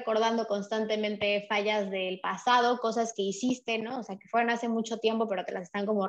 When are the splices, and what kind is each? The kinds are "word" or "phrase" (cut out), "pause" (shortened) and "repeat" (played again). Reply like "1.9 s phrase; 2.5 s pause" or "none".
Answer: none

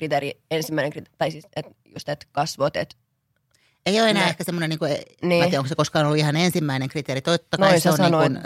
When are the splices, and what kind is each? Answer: none

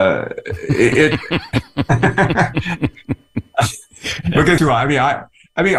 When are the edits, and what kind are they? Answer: 4.6 s word

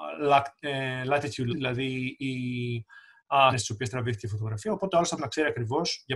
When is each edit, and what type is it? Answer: 1.5 s word; 3.5 s word; 5.2 s word

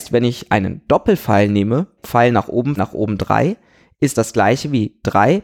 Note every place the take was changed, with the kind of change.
2.0 s word; 2.8 s word; 4.1 s word

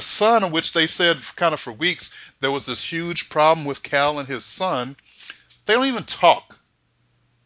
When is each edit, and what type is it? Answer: none

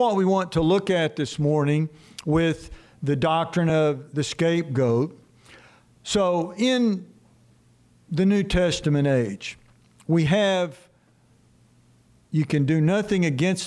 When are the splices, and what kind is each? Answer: none

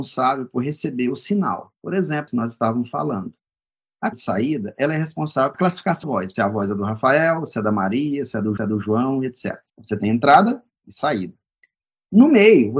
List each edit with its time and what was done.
1.8 s pause; 2.3 s phrase; 4.1 s word; 5.5 s phrase; 6.0 s word; 6.3 s phrase; 8.6 s repeat; 9.7 s pause

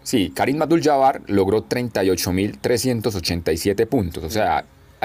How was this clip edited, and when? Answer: none

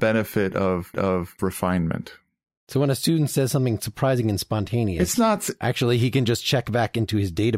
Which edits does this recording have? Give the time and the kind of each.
0.9 s repeat

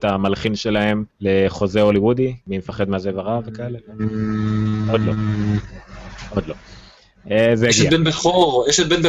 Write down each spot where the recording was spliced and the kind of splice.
1.1 s pause; 2.4 s pause

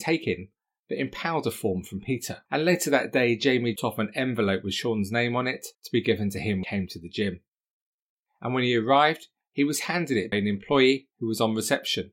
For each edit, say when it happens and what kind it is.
2.5 s pause; 3.8 s word; 5.7 s pause; 6.6 s word; 10.3 s word

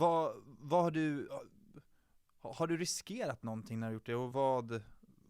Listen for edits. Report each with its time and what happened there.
4.3 s word

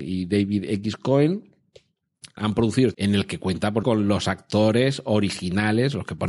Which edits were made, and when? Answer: 2.4 s word; 2.9 s word; 3.8 s word

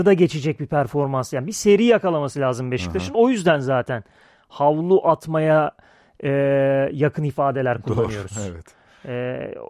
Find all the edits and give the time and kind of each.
none

